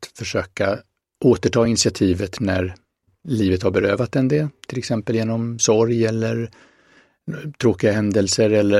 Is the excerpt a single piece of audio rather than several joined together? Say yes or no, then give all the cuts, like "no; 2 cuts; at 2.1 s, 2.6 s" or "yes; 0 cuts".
yes; 0 cuts